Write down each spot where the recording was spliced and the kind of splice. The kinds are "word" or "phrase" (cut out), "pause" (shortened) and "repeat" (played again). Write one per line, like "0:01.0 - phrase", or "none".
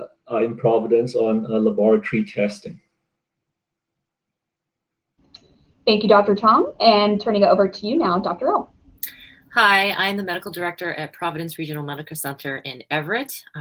none